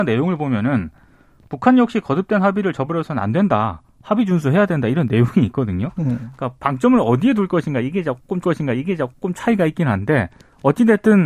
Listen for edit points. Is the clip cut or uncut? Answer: cut